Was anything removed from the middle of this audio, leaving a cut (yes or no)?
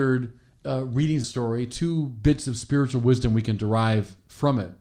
yes